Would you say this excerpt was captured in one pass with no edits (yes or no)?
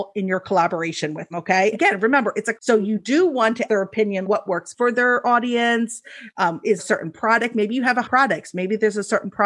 no